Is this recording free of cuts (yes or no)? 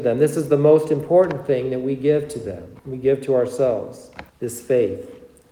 no